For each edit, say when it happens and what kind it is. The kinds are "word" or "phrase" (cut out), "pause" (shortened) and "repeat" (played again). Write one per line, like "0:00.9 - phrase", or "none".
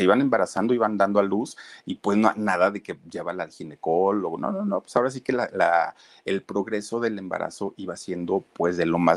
none